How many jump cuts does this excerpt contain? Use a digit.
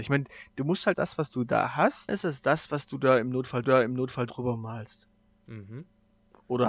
3